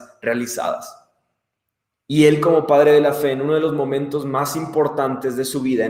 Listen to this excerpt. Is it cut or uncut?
uncut